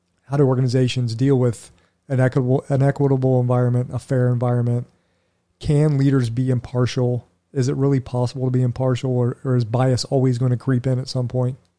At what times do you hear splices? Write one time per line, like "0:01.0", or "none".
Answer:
none